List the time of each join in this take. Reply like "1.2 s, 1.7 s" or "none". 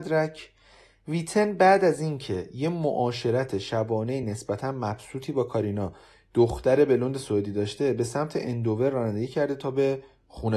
none